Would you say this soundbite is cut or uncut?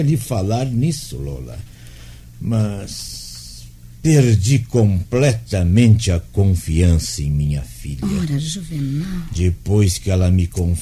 uncut